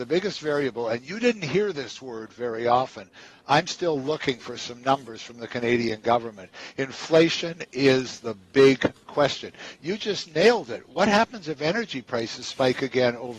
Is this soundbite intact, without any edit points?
yes; 0 cuts

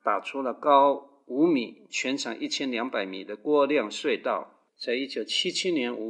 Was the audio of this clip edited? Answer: yes; 2 cuts; at 1.9 s, 4.7 s

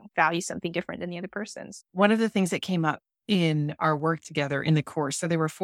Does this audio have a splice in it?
no; 0 cuts

